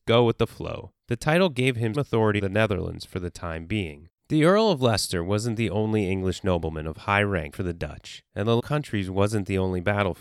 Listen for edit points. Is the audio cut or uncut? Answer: cut